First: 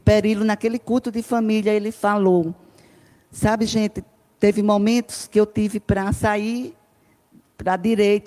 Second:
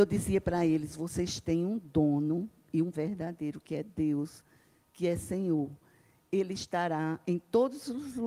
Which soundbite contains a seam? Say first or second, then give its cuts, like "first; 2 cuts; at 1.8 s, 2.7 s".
second; 1 cut; at 2.9 s